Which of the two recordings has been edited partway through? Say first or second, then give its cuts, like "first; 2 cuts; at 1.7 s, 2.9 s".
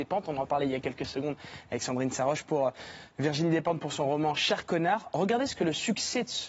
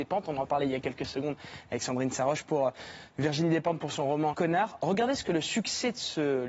second; 1 cut; at 4.3 s